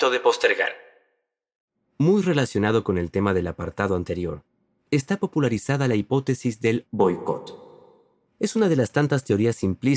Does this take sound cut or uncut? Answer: uncut